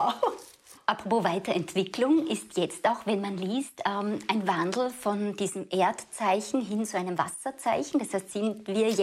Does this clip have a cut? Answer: no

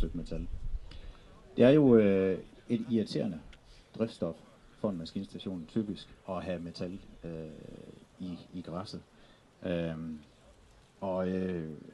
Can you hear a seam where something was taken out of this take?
yes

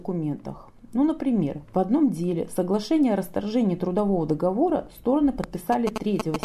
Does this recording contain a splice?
no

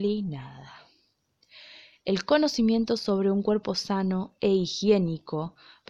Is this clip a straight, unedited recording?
yes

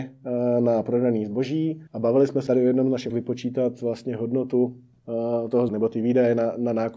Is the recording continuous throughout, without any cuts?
no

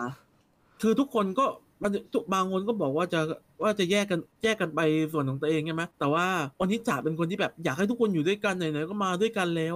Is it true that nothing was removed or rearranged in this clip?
no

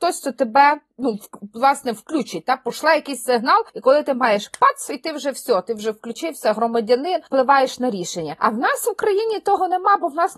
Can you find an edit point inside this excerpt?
yes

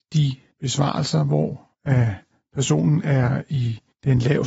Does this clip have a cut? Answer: no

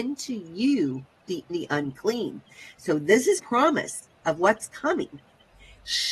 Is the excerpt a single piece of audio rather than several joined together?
no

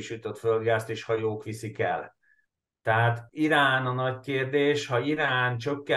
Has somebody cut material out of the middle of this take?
no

